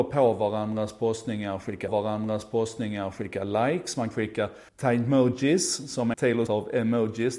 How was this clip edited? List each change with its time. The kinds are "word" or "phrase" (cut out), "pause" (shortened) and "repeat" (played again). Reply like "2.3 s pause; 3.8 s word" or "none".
1.9 s repeat; 4.1 s word; 4.7 s pause; 6.1 s phrase; 6.5 s word